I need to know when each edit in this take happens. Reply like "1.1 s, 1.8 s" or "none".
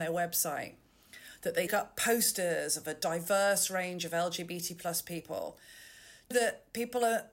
1.7 s, 6.3 s